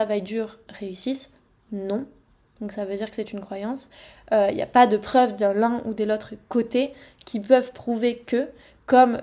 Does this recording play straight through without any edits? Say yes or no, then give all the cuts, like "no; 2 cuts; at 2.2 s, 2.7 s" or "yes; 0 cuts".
yes; 0 cuts